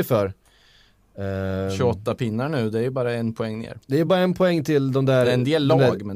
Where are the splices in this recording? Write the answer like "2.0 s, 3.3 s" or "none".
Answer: none